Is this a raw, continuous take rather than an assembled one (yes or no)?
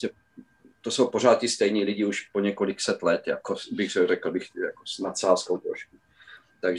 yes